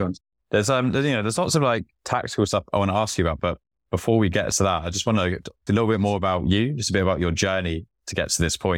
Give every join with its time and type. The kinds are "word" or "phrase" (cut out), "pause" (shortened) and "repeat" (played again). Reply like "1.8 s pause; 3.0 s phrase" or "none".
5.7 s word